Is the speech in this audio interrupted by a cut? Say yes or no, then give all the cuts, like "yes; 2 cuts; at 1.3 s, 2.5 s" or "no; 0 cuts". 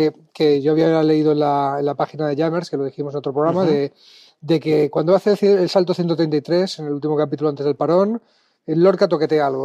no; 0 cuts